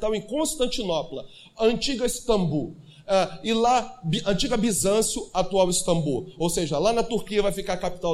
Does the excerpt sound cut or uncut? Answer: uncut